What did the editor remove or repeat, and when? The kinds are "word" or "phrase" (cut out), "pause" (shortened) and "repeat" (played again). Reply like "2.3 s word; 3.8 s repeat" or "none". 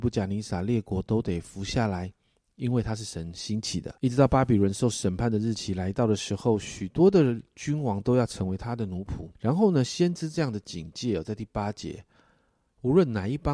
4.0 s pause; 9.4 s pause